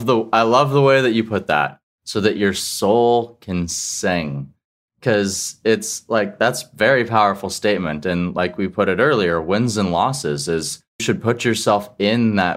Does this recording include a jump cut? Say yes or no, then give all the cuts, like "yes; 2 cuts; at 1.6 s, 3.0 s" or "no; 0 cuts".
yes; 1 cut; at 11.0 s